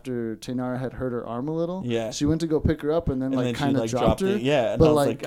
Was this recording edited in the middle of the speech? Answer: no; 0 cuts

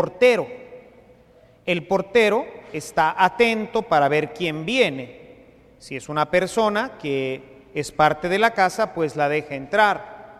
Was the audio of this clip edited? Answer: no; 0 cuts

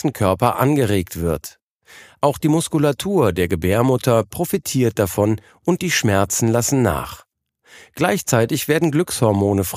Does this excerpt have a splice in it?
no; 0 cuts

